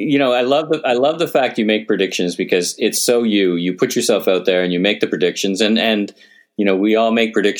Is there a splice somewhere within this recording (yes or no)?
no